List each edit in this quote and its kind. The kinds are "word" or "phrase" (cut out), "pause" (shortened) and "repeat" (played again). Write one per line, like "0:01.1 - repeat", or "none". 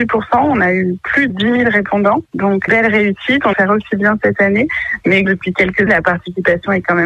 0:01.3 - word
0:02.7 - word
0:03.5 - word
0:05.2 - word
0:05.9 - word